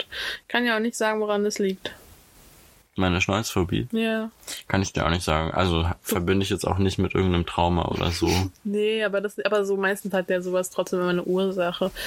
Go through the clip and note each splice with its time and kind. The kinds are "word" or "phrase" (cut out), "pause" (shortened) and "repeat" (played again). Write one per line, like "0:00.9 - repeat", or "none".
none